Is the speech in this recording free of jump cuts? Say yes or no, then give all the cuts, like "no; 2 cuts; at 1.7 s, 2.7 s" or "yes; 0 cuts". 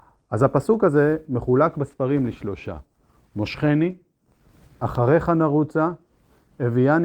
yes; 0 cuts